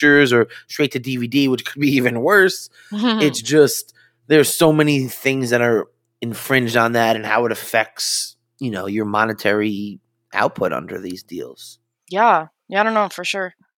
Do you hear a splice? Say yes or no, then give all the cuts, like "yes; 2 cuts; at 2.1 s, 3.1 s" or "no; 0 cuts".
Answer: no; 0 cuts